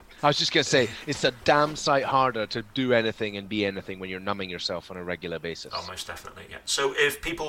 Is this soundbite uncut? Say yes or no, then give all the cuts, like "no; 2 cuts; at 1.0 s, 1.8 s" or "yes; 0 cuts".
yes; 0 cuts